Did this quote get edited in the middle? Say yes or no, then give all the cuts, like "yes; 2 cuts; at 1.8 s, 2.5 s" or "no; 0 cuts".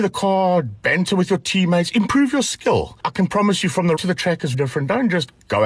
yes; 2 cuts; at 4.0 s, 4.5 s